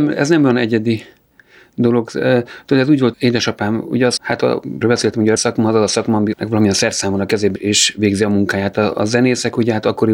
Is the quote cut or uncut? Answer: cut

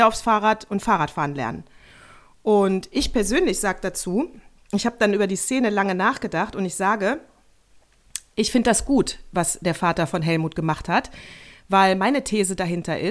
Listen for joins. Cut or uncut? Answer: uncut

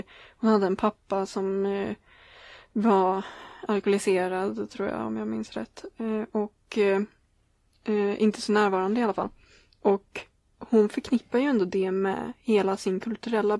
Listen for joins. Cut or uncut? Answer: uncut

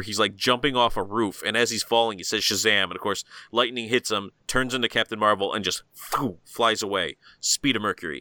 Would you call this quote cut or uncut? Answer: uncut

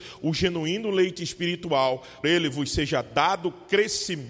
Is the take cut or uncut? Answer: cut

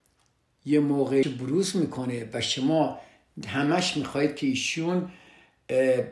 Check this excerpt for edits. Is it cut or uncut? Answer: cut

